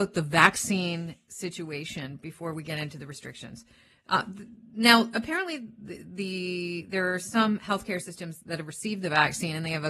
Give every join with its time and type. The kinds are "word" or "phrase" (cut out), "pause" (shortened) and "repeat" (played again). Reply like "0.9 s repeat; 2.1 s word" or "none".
none